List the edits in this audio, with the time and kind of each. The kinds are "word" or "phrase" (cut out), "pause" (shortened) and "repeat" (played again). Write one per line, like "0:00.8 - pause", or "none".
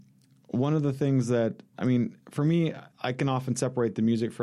0:02.2 - pause
0:02.9 - pause